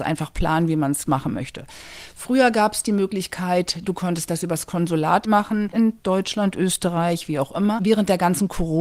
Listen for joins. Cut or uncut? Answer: uncut